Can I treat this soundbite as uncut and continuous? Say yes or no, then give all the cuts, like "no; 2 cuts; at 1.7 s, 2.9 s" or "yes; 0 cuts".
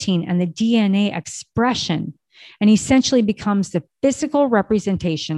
yes; 0 cuts